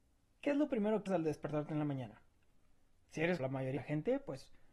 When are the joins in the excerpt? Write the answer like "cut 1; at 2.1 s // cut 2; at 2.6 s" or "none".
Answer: cut 1; at 1.1 s // cut 2; at 3.4 s // cut 3; at 3.8 s